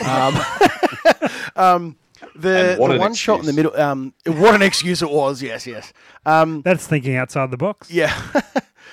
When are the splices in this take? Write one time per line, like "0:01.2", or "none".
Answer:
0:04.2